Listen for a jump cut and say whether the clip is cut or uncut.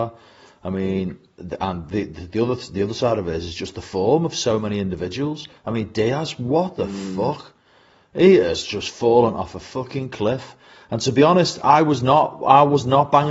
uncut